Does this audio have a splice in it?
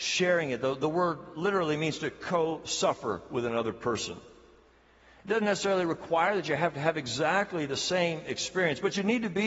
no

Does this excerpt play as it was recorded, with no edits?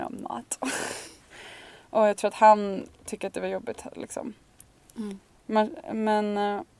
yes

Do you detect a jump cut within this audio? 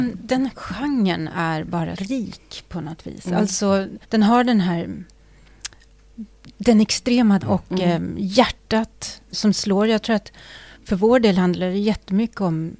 yes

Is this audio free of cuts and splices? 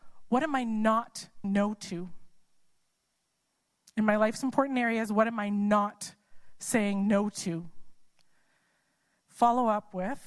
no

